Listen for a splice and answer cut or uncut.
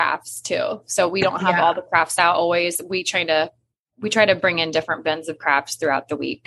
uncut